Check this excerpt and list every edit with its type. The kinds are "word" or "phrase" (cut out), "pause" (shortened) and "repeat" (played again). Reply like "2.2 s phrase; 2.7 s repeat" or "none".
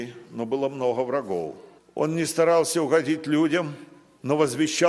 none